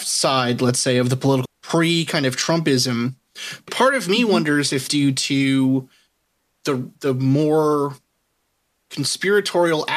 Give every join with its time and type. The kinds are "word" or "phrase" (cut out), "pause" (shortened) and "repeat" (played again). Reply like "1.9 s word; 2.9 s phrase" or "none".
1.4 s word; 3.7 s word; 4.9 s phrase; 6.9 s pause